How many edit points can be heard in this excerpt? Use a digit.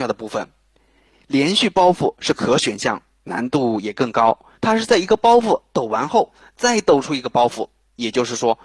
1